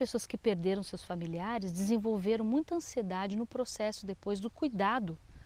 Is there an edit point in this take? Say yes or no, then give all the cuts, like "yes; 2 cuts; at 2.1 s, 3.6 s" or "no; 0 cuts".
no; 0 cuts